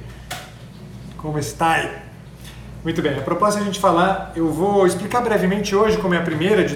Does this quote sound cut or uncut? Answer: uncut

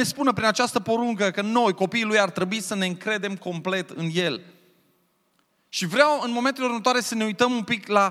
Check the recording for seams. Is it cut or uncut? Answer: uncut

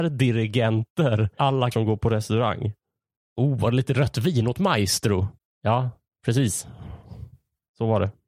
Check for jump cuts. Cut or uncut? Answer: cut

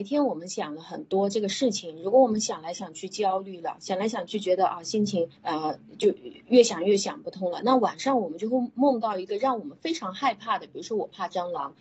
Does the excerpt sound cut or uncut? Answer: cut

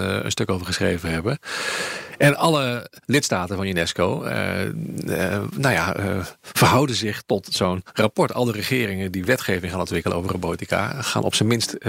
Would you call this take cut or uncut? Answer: uncut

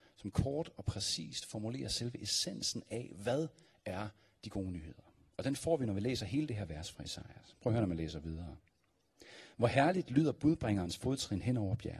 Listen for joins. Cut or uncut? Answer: uncut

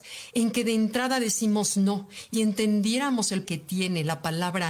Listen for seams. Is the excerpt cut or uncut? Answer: cut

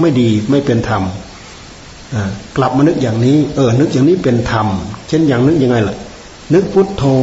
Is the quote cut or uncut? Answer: uncut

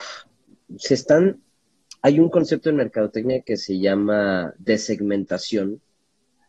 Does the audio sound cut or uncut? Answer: uncut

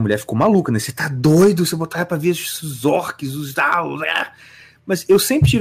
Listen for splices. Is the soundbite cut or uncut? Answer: uncut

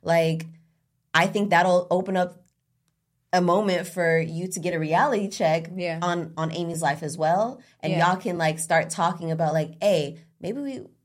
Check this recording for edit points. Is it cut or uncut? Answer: uncut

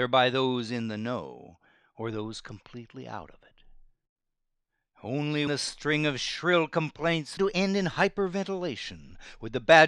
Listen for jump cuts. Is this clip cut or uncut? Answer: cut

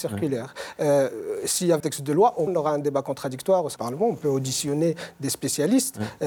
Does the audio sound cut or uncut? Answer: cut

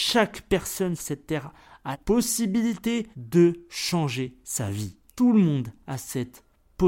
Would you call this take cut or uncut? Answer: cut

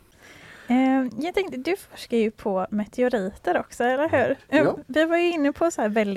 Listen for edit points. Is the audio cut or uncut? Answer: uncut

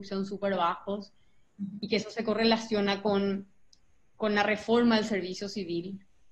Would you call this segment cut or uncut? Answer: uncut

